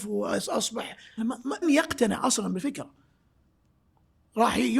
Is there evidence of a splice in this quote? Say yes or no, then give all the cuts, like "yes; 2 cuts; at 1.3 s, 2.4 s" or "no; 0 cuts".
yes; 2 cuts; at 1.2 s, 1.6 s